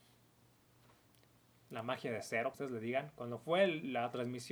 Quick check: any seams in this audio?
yes; 1 cut; at 2.5 s

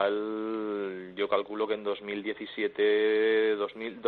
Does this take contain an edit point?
no; 0 cuts

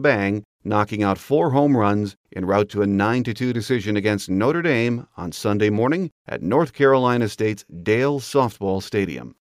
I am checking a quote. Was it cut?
no; 0 cuts

